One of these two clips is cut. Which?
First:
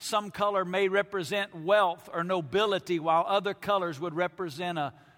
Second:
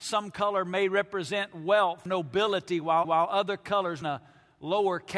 second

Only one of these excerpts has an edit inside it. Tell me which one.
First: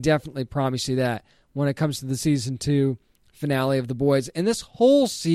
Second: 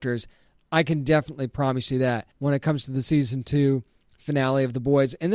second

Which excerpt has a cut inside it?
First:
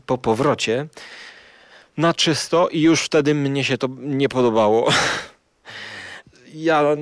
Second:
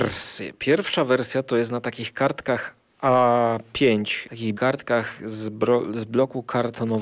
second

